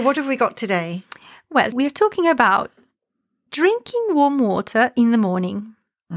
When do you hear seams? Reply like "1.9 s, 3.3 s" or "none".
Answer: 1.7 s

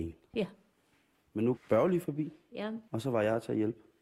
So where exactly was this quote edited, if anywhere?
1.6 s, 2.9 s

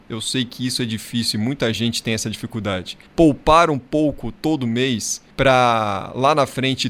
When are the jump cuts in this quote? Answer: 3.1 s, 5.3 s

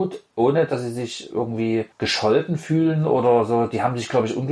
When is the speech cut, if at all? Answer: none

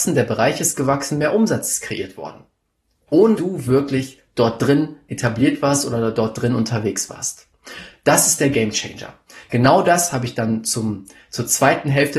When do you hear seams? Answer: 3.4 s

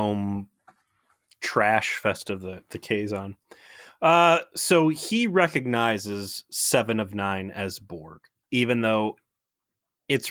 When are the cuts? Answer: 8.3 s

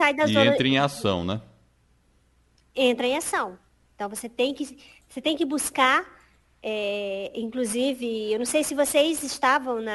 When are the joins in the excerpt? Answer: none

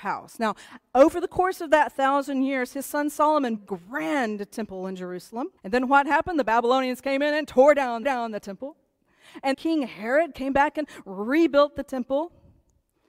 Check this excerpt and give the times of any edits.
3.6 s, 5.6 s, 8.0 s, 9.5 s

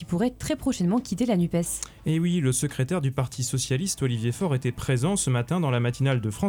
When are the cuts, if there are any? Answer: none

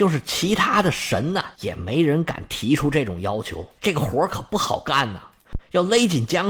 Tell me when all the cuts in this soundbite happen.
1.5 s, 3.8 s

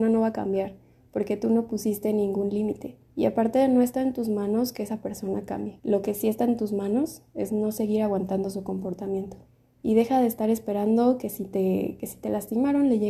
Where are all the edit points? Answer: 3.0 s, 5.8 s, 9.5 s

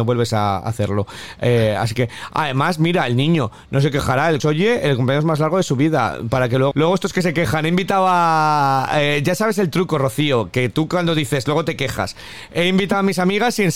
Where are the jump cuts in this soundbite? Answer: 4.4 s, 6.7 s

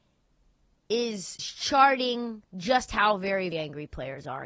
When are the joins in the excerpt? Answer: 1.4 s, 2.5 s, 3.5 s

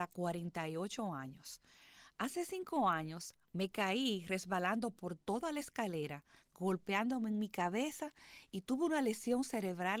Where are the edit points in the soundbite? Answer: none

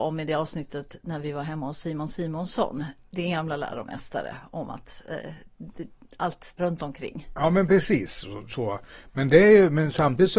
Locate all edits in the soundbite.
6.6 s

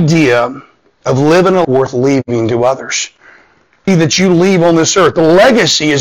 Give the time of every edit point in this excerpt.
1.6 s, 3.9 s

